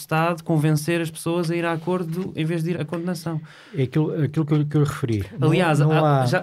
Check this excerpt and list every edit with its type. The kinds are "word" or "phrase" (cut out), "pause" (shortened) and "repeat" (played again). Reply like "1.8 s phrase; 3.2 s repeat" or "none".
2.7 s word